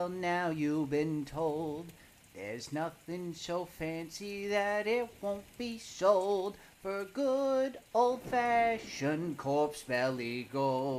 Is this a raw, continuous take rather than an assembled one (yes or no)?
yes